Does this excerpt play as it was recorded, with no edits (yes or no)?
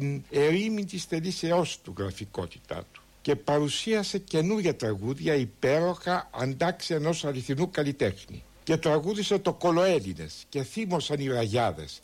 yes